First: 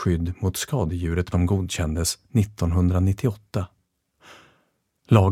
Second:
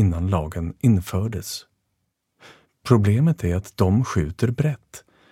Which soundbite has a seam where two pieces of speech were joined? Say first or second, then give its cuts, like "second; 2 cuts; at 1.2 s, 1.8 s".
first; 1 cut; at 1.3 s